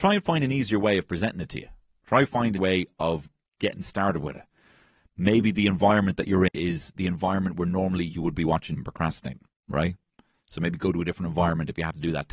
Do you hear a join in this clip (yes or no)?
yes